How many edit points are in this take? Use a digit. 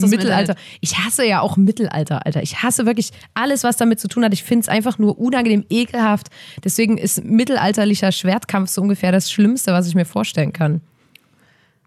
0